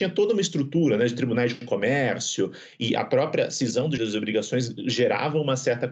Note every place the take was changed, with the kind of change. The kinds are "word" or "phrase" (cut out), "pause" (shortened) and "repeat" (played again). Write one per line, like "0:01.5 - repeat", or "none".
0:04.0 - word